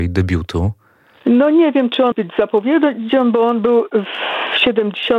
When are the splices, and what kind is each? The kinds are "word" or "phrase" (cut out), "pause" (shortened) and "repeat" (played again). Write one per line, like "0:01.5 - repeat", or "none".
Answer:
0:02.1 - word